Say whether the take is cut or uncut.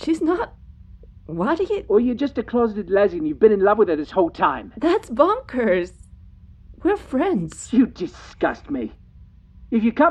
uncut